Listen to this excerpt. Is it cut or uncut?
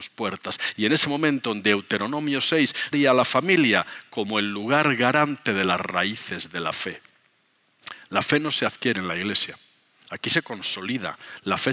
cut